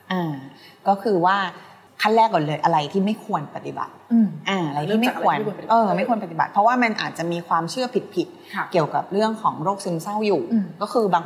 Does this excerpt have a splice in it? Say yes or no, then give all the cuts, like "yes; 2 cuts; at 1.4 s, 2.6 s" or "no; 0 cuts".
yes; 1 cut; at 1.9 s